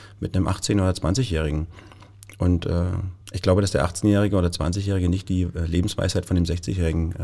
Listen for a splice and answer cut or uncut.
cut